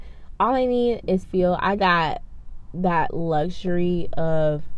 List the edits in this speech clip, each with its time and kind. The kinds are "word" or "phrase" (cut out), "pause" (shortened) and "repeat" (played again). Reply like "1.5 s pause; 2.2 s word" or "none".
1.2 s word; 1.8 s word; 2.7 s word